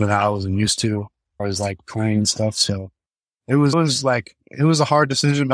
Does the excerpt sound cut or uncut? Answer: cut